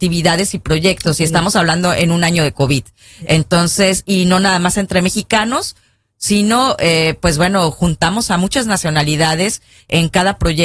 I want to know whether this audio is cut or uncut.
uncut